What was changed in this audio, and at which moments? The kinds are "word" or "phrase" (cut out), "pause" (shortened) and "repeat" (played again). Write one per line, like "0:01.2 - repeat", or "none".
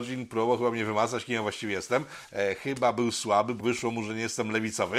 0:03.6 - word